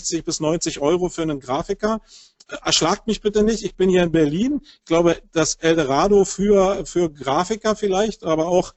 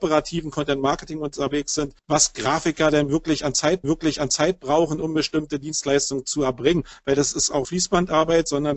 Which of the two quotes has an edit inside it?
second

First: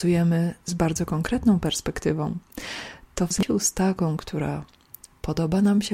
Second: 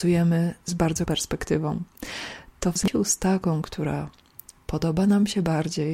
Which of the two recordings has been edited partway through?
second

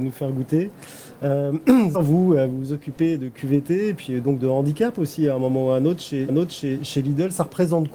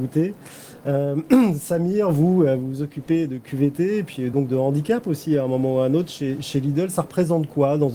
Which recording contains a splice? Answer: first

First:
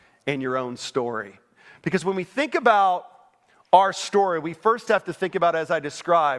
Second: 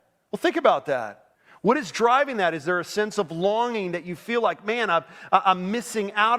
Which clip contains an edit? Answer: second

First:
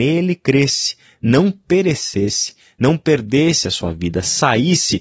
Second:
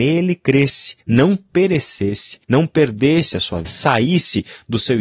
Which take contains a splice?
second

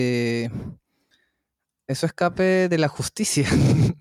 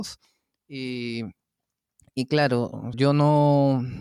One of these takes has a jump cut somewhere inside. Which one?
second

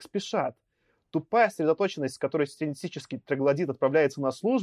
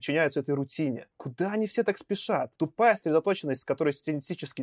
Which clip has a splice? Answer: second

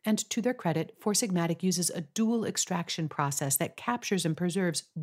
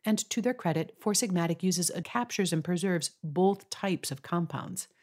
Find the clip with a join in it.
second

